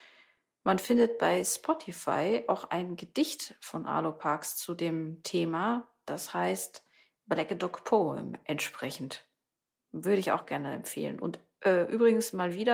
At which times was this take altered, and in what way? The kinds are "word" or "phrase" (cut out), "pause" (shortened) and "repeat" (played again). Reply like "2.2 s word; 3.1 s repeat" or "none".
none